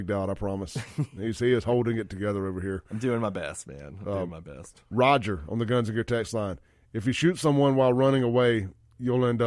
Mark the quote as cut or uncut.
uncut